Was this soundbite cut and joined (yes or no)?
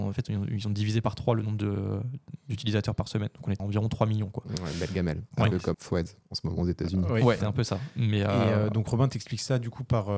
yes